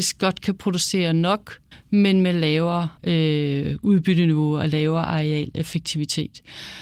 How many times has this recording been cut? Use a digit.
2